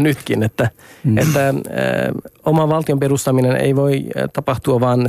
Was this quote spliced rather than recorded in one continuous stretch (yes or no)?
no